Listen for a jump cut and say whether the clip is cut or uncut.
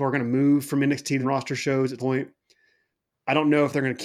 cut